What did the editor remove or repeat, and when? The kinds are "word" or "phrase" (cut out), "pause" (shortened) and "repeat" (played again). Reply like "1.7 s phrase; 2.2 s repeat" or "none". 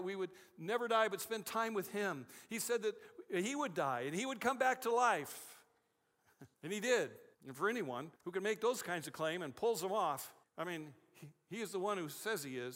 6.5 s pause; 7.3 s pause; 8.2 s pause; 10.4 s pause